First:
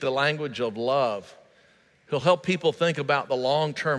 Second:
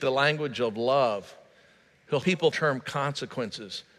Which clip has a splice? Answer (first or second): second